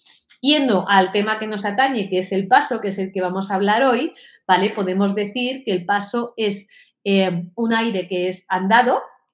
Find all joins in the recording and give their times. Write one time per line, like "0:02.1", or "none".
none